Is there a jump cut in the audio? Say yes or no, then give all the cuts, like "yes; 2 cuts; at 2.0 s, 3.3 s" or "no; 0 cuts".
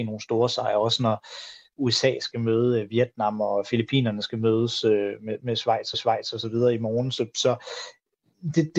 yes; 1 cut; at 5.9 s